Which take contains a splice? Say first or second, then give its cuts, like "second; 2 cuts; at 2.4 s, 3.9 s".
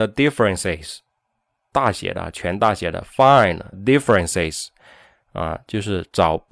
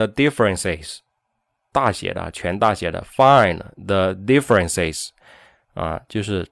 first; 1 cut; at 3.7 s